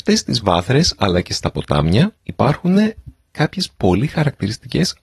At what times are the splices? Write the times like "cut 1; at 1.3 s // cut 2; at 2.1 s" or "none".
cut 1; at 2.2 s